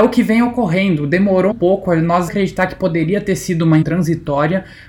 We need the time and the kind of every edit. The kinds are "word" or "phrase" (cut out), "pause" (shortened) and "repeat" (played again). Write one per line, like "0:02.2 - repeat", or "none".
0:01.5 - word
0:02.3 - phrase
0:03.8 - word

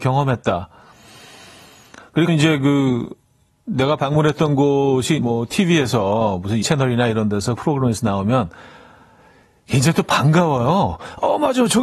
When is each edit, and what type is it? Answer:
0:02.3 - word
0:05.2 - word
0:06.6 - word
0:07.6 - word

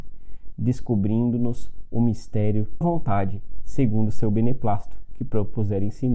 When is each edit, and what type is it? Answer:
0:02.8 - phrase

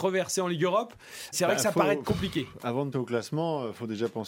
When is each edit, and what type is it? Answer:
0:01.3 - word
0:02.9 - word

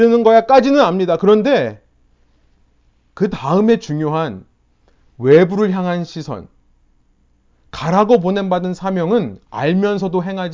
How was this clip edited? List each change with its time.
none

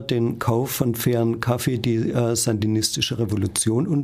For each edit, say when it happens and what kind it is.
none

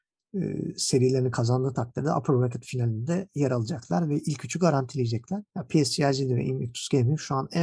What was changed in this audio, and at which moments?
0:05.5 - pause

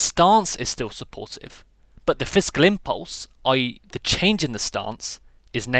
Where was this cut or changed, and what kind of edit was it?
none

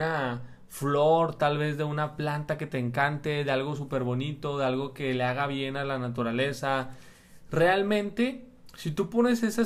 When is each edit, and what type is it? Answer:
none

